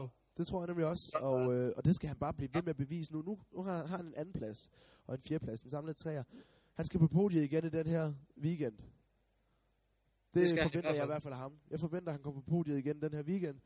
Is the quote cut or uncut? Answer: uncut